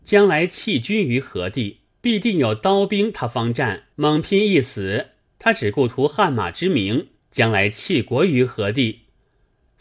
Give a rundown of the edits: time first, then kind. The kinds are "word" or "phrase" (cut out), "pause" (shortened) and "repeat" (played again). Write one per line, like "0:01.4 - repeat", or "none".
0:01.9 - pause
0:03.9 - pause
0:05.3 - pause
0:07.2 - pause